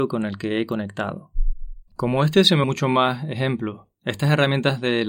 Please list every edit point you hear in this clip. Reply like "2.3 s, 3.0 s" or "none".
1.9 s, 2.6 s, 3.9 s